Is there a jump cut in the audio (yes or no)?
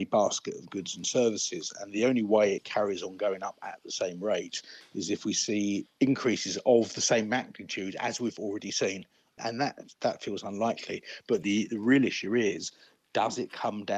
no